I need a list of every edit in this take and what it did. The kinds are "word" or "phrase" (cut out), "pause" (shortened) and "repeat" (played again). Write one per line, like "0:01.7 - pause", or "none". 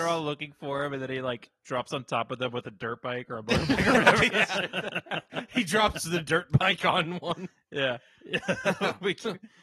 0:04.3 - word